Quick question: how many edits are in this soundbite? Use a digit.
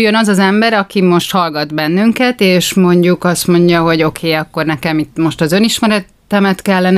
0